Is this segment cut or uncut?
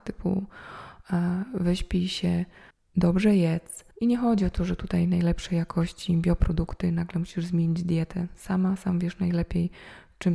cut